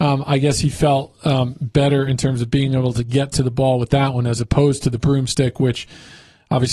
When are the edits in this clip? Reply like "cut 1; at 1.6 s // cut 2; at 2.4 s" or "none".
none